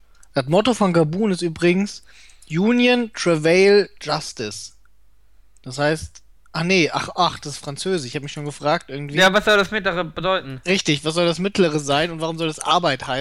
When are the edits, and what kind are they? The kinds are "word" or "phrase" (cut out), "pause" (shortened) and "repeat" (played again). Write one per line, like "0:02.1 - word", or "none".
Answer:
none